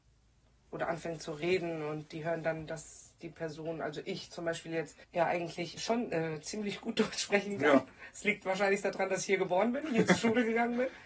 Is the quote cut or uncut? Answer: cut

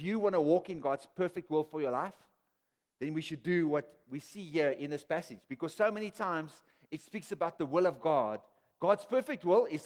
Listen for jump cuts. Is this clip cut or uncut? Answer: uncut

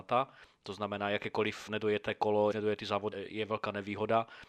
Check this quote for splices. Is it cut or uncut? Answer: cut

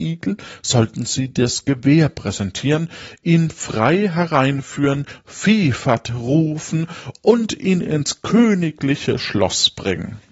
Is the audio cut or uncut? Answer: uncut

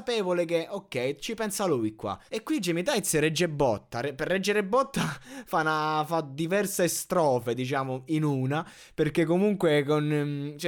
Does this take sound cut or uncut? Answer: cut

